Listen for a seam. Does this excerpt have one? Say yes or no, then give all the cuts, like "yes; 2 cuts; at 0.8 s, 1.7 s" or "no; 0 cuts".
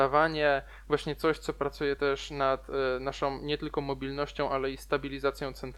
no; 0 cuts